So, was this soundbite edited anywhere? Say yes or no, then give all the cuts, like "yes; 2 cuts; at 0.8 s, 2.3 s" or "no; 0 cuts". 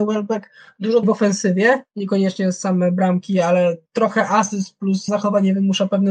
yes; 3 cuts; at 1.0 s, 3.9 s, 5.1 s